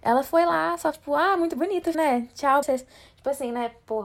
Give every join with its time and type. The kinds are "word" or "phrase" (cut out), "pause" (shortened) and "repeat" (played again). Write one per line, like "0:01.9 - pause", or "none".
0:00.9 - word
0:01.9 - word
0:02.6 - phrase